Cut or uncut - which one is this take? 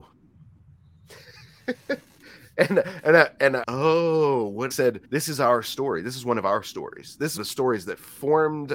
cut